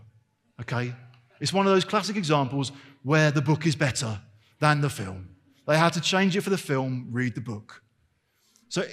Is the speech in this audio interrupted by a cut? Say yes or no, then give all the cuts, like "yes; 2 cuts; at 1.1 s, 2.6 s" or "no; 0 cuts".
no; 0 cuts